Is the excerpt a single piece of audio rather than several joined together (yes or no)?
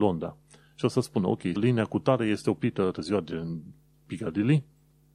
no